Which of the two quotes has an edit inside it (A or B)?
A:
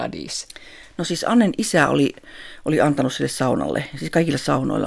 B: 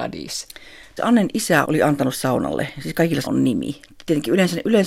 B